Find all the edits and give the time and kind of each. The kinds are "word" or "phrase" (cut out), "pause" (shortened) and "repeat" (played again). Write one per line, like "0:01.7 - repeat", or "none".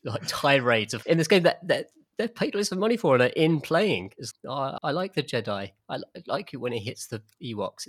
0:01.0 - word
0:04.3 - word
0:04.8 - word